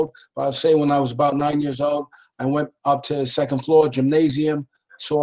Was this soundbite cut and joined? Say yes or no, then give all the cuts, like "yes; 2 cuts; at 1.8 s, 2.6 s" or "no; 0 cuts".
no; 0 cuts